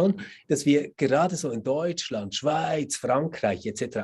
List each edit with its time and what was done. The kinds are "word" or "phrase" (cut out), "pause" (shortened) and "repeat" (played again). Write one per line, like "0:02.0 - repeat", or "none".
none